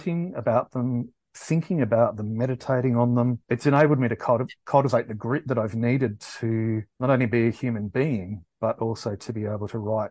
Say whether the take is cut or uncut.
cut